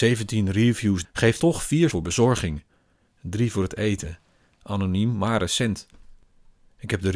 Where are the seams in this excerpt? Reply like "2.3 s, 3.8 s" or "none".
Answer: 1.0 s, 1.4 s, 1.9 s